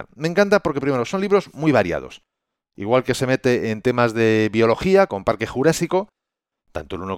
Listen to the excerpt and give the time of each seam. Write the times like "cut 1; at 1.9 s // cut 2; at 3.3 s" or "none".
none